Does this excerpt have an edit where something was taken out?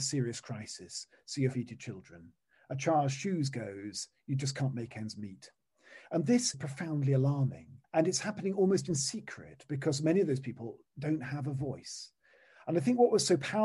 yes; 3 cuts; at 1.5 s, 6.5 s, 7.8 s

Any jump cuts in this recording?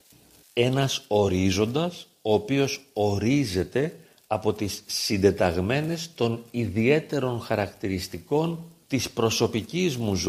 no; 0 cuts

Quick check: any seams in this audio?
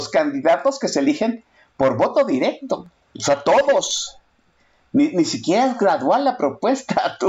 no; 0 cuts

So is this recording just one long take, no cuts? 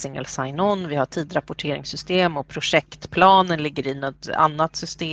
yes; 0 cuts

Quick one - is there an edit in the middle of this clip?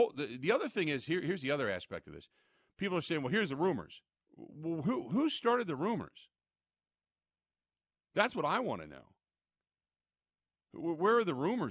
no; 0 cuts

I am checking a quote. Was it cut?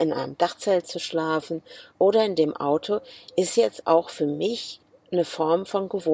no; 0 cuts

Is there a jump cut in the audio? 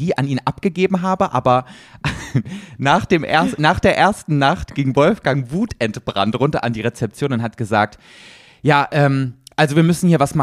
no; 0 cuts

